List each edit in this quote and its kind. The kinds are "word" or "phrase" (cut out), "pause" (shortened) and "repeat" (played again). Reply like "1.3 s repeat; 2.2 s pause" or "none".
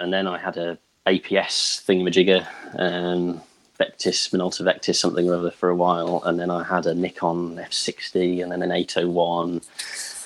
none

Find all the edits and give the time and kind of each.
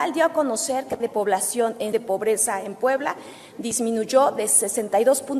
1.0 s word; 1.9 s word

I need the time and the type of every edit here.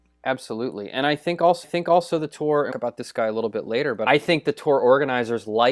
1.6 s repeat; 2.7 s phrase; 4.1 s word

